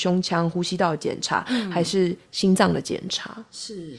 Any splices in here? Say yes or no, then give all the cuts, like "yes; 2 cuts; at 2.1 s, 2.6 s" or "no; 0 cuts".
no; 0 cuts